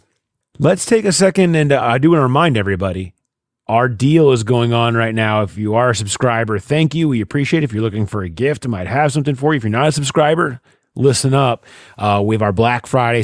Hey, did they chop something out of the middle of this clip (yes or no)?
yes